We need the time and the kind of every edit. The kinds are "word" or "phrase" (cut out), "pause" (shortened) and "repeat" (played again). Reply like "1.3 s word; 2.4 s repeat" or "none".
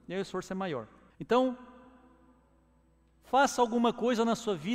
1.1 s pause